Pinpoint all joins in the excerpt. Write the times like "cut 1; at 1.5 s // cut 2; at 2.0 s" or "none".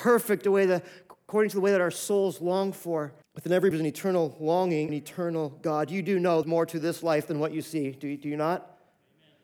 cut 1; at 3.2 s // cut 2; at 3.7 s // cut 3; at 4.9 s // cut 4; at 6.4 s